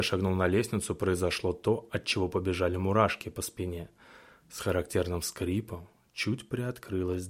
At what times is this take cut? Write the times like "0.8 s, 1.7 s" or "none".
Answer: none